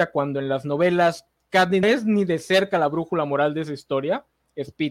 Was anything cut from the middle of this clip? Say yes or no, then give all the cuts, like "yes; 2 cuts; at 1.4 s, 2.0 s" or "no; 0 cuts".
yes; 1 cut; at 1.8 s